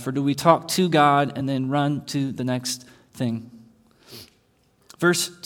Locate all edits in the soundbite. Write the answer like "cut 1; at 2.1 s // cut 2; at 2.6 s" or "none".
none